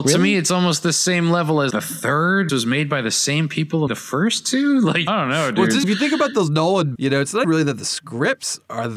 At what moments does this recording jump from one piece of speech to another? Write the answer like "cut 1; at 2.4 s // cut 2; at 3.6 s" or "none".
cut 1; at 1.7 s // cut 2; at 2.5 s // cut 3; at 3.9 s // cut 4; at 5.1 s // cut 5; at 5.8 s // cut 6; at 6.9 s // cut 7; at 7.4 s